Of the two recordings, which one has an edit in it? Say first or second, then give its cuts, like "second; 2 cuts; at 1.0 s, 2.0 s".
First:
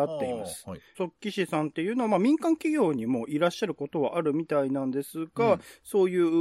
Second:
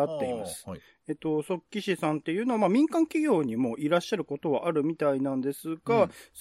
first; 1 cut; at 0.9 s